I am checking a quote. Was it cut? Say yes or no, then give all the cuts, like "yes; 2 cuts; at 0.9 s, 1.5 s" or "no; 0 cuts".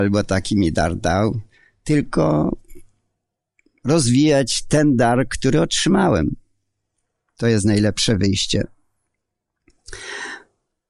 no; 0 cuts